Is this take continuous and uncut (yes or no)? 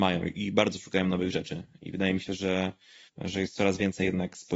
yes